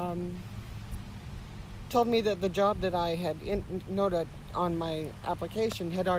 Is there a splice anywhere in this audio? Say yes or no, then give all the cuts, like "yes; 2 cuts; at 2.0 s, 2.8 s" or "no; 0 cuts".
no; 0 cuts